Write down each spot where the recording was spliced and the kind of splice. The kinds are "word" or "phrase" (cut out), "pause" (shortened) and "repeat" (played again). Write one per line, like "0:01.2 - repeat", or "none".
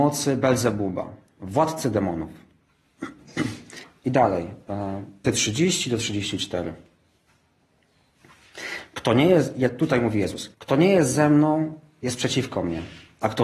0:05.2 - word
0:10.5 - pause